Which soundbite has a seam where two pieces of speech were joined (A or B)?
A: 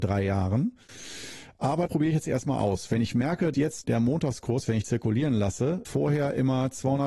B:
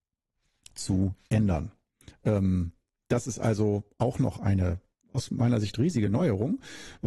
A